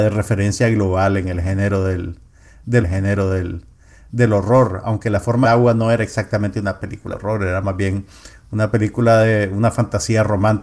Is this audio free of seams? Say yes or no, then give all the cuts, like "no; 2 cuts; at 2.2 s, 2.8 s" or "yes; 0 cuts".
no; 3 cuts; at 2.8 s, 5.4 s, 7.1 s